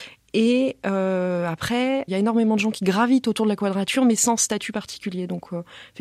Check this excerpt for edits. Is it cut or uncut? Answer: cut